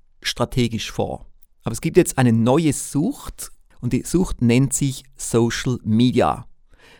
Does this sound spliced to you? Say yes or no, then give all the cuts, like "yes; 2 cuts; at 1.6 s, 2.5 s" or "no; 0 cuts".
no; 0 cuts